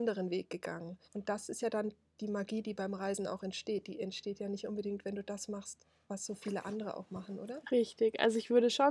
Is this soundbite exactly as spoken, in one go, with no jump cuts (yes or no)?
no